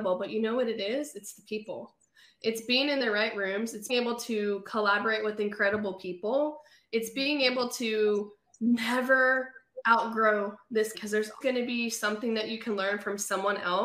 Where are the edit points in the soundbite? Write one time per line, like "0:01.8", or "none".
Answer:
0:03.9
0:10.9
0:11.4

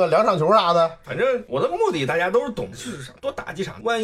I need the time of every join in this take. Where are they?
0:02.7

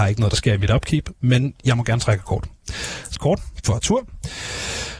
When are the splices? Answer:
0:03.1

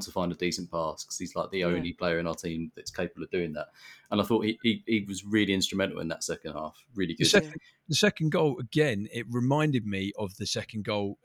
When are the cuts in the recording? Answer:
none

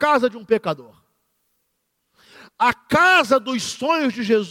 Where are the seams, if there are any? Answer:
none

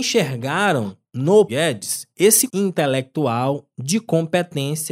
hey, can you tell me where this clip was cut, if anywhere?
0:01.5
0:02.5

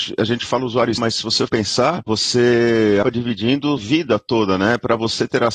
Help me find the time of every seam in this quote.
0:01.0
0:01.5
0:03.0
0:03.8

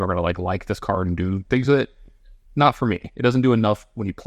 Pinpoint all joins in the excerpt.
none

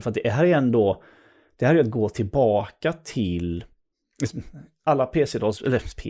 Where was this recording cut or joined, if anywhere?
none

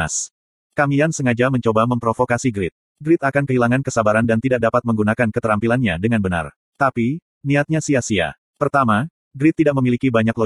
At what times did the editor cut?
none

